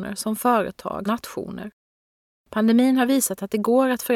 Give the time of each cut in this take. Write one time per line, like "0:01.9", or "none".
0:01.1